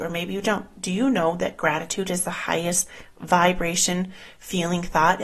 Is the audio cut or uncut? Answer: uncut